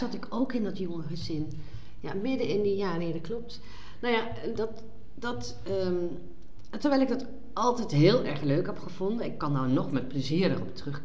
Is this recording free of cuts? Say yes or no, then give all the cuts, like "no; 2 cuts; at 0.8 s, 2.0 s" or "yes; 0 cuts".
yes; 0 cuts